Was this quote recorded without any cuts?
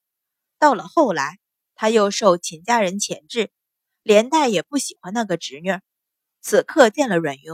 yes; 0 cuts

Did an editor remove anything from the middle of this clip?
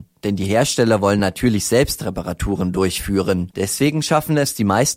no; 0 cuts

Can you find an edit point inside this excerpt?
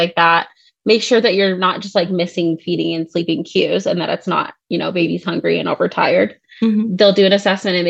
no; 0 cuts

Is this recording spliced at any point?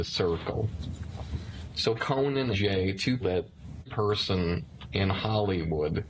yes; 4 cuts; at 2.0 s, 2.5 s, 3.2 s, 3.9 s

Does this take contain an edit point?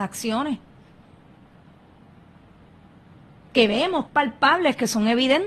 yes; 1 cut; at 4.1 s

